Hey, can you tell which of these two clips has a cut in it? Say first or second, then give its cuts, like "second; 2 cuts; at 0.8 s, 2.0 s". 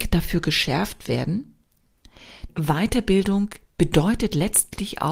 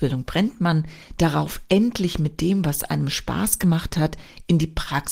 first; 1 cut; at 2.5 s